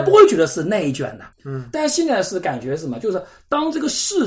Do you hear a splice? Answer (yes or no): yes